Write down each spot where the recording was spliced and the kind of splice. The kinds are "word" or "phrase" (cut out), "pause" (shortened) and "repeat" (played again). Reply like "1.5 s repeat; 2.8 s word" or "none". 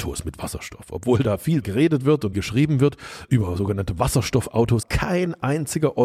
1.6 s word; 2.3 s phrase; 3.3 s word; 4.8 s word